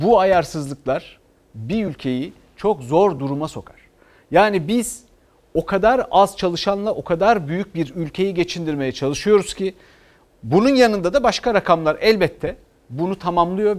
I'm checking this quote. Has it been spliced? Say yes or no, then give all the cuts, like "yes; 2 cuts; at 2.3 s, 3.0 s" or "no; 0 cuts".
no; 0 cuts